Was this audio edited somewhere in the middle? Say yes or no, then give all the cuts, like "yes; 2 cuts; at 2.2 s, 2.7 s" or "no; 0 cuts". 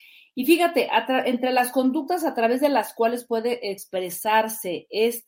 no; 0 cuts